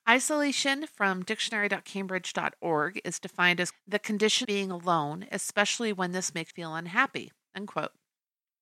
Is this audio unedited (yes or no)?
no